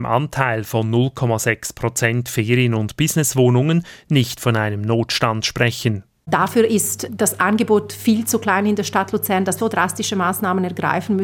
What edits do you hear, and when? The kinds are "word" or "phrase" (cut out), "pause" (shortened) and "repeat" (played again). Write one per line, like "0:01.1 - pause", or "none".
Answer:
0:07.1 - word
0:09.6 - word